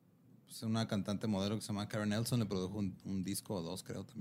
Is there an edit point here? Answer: no; 0 cuts

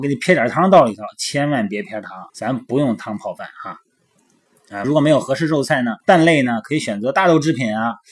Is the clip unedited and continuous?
no; 3 cuts; at 2.3 s, 4.8 s, 6.0 s

